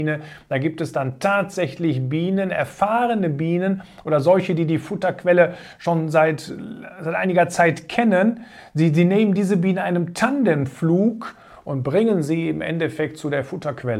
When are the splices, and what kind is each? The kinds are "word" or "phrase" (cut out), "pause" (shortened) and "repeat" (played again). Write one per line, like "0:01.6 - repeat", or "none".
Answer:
none